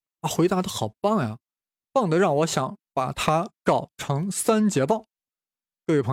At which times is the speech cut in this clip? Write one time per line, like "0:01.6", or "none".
none